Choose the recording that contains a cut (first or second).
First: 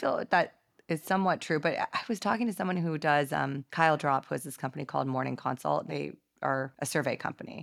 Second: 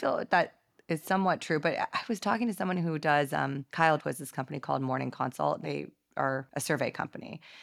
second